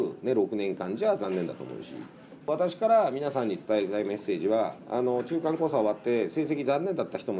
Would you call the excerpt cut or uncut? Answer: cut